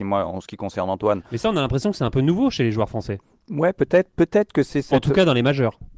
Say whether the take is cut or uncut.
uncut